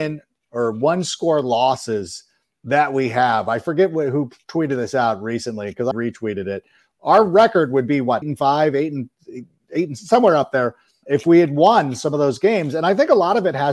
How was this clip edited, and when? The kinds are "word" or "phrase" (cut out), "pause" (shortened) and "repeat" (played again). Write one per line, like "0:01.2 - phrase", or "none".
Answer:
0:05.9 - word
0:08.2 - word
0:11.0 - word